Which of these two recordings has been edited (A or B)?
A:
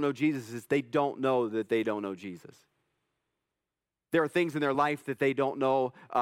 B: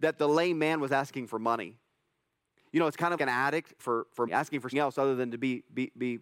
B